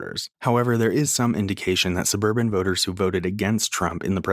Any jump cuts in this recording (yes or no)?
no